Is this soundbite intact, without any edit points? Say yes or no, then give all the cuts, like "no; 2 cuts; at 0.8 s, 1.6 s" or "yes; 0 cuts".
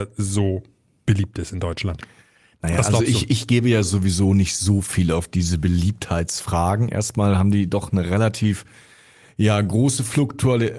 yes; 0 cuts